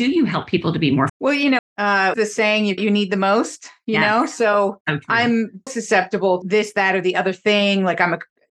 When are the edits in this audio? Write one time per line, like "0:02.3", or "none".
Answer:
0:01.1
0:01.6
0:02.1
0:02.8
0:04.8
0:05.7
0:06.4